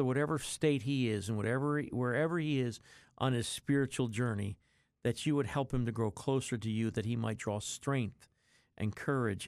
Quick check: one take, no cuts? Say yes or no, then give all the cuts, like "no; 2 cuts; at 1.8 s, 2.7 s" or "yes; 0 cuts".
yes; 0 cuts